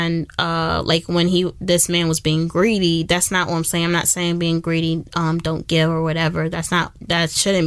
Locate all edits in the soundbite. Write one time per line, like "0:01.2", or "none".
none